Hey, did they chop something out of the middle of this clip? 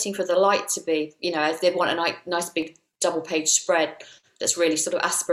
no; 0 cuts

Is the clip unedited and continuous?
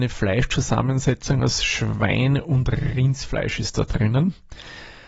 yes; 0 cuts

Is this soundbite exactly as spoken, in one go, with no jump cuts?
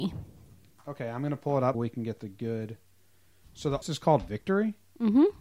no; 2 cuts; at 1.7 s, 3.8 s

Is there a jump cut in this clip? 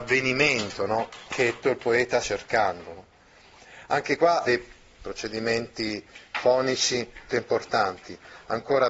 yes; 4 cuts; at 1.6 s, 2.2 s, 4.4 s, 7.3 s

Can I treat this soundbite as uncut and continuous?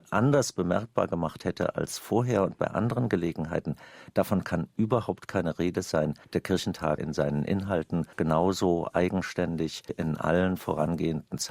no; 4 cuts; at 6.2 s, 7.0 s, 8.1 s, 9.9 s

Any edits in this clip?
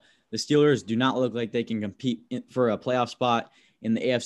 no; 0 cuts

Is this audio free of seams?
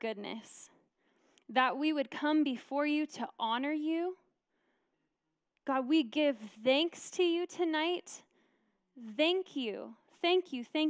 yes; 0 cuts

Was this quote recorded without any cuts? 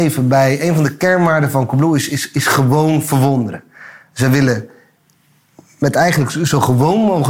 yes; 0 cuts

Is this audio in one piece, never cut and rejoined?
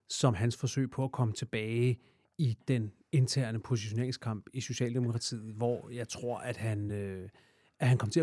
yes; 0 cuts

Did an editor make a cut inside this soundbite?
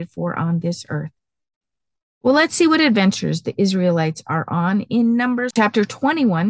no; 0 cuts

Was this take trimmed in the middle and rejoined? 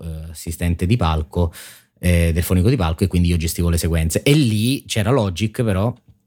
no; 0 cuts

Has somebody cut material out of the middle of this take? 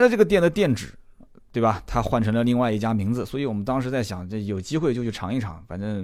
no; 0 cuts

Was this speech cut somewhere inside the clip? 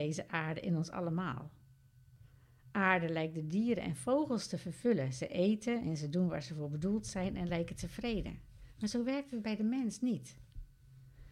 no; 0 cuts

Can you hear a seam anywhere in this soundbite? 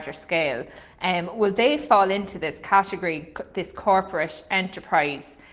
no; 0 cuts

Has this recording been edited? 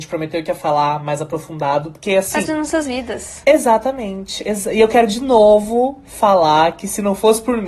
yes; 1 cut; at 2.5 s

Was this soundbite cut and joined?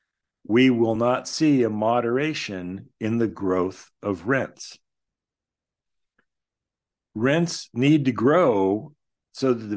no; 0 cuts

